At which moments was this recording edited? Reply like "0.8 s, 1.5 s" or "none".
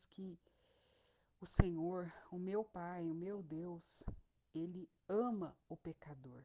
none